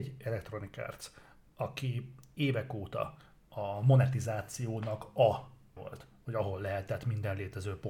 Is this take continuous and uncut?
no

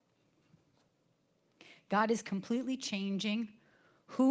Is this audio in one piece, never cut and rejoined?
yes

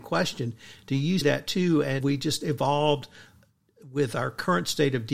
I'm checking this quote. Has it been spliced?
yes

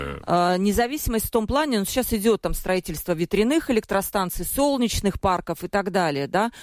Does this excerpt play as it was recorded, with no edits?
yes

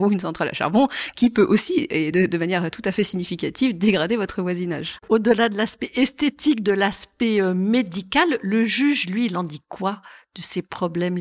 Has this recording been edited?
no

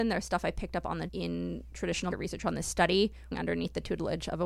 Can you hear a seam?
yes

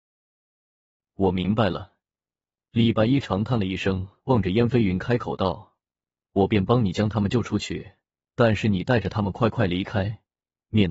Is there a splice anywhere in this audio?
no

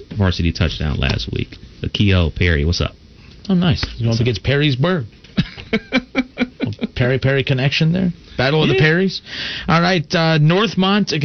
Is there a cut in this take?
no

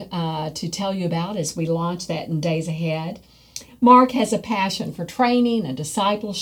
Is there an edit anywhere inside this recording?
no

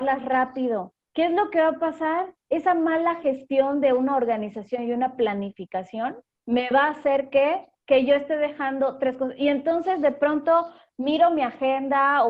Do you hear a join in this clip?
no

